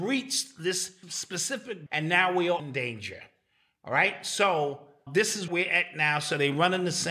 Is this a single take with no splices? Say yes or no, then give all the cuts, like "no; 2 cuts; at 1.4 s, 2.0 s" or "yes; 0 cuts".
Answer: no; 5 cuts; at 1.0 s, 1.9 s, 2.6 s, 5.1 s, 5.5 s